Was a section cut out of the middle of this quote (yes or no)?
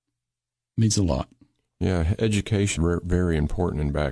yes